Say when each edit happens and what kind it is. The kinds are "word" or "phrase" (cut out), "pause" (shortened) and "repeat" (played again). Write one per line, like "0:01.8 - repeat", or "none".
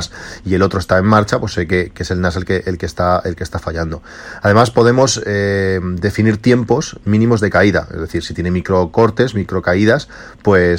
none